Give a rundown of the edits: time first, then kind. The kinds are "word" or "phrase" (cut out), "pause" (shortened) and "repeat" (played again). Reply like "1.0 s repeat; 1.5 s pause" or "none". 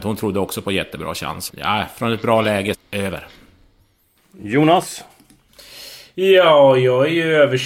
1.5 s word; 2.7 s phrase